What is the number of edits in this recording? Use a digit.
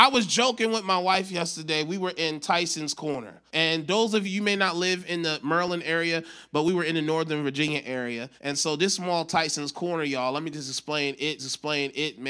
4